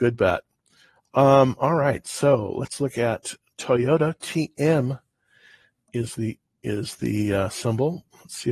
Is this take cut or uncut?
uncut